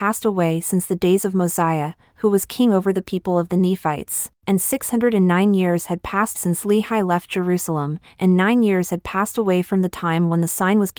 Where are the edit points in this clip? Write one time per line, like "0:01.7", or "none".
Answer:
0:04.4
0:06.3